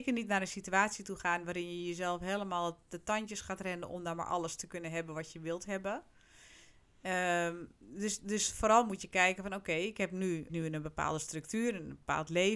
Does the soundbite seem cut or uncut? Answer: cut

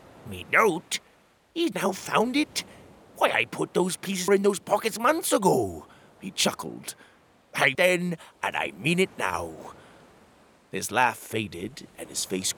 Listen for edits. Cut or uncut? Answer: cut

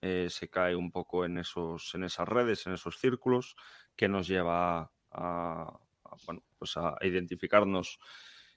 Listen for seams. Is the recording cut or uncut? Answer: uncut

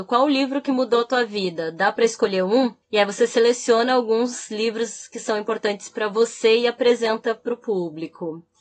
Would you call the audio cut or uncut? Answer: cut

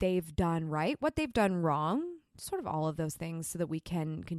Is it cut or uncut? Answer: uncut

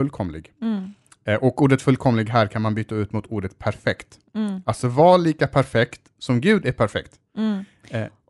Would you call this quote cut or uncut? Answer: uncut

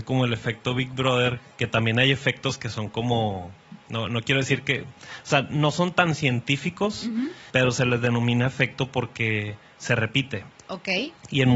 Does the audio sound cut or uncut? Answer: cut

